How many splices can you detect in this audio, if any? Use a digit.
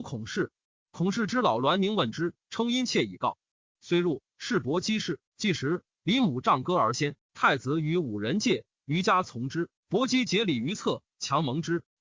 2